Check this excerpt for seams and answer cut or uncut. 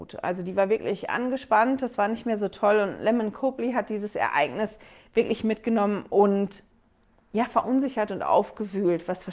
uncut